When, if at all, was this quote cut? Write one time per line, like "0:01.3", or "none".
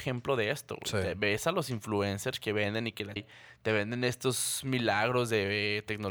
0:03.2